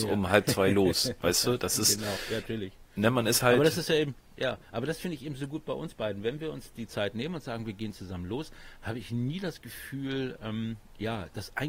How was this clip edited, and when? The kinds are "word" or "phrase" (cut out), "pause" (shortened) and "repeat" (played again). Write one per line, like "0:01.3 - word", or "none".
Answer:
none